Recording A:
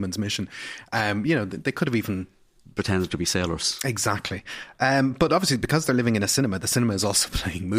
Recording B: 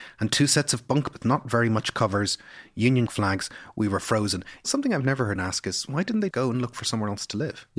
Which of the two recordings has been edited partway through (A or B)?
B